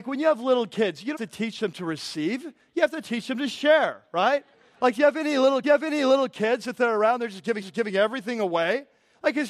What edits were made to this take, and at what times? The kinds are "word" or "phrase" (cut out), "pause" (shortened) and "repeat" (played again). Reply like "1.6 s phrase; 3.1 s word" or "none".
1.1 s word; 4.5 s pause; 5.6 s repeat; 7.6 s repeat